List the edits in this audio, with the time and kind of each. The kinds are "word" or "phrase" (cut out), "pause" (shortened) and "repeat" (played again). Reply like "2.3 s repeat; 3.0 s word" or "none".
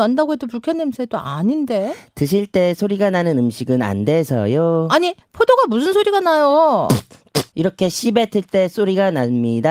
5.2 s pause; 7.5 s pause